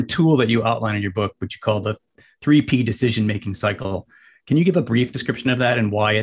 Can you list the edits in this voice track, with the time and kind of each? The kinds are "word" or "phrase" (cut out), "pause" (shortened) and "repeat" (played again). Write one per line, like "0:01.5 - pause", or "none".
none